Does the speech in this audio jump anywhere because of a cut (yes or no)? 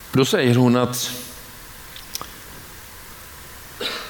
no